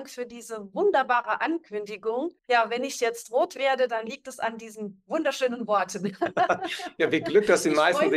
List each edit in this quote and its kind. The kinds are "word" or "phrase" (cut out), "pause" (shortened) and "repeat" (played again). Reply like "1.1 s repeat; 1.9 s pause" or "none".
2.4 s pause